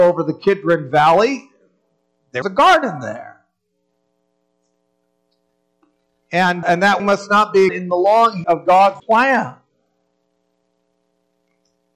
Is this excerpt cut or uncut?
cut